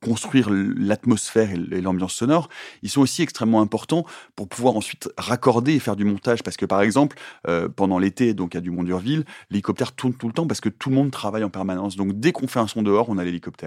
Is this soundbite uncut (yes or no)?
yes